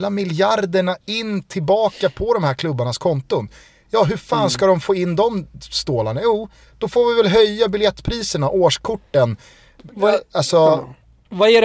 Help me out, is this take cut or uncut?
uncut